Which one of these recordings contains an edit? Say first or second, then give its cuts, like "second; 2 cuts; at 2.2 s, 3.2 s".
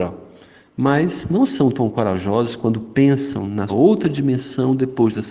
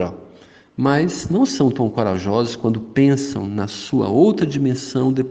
first; 1 cut; at 3.7 s